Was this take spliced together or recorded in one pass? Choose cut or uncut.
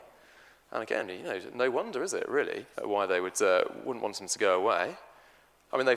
cut